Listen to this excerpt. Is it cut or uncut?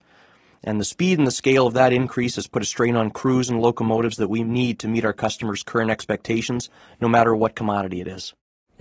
uncut